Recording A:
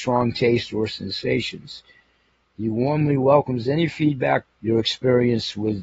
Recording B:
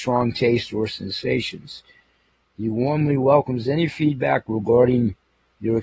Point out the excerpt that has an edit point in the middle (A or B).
A